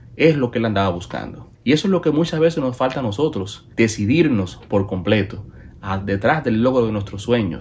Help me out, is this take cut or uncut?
cut